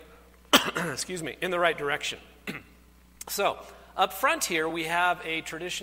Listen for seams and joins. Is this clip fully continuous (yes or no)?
yes